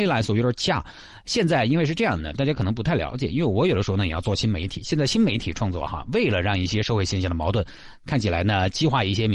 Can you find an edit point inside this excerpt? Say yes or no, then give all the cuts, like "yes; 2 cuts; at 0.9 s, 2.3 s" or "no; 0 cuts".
no; 0 cuts